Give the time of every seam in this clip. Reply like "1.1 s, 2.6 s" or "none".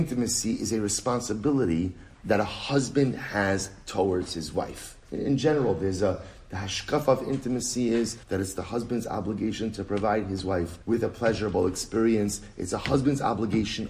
5.0 s, 8.2 s, 10.8 s